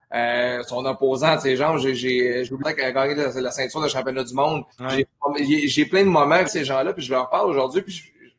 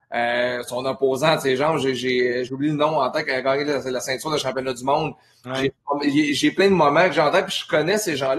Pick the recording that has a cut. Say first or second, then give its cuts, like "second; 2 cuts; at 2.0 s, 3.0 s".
first; 3 cuts; at 2.6 s, 4.7 s, 6.5 s